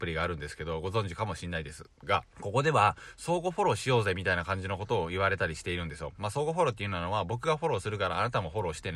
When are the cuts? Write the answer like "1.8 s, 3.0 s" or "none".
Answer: 2.3 s

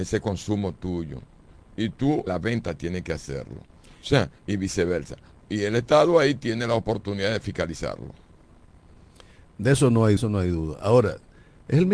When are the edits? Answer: 2.3 s, 10.2 s

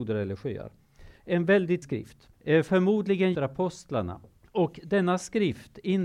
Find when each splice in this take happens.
1.2 s, 1.8 s, 2.3 s, 3.3 s, 4.4 s

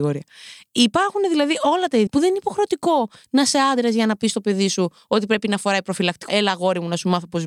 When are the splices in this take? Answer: 2.1 s, 6.3 s

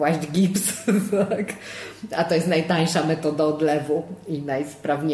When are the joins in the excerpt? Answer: none

